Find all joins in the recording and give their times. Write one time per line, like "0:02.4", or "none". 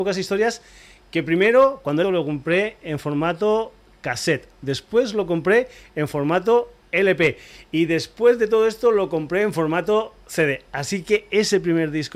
0:02.0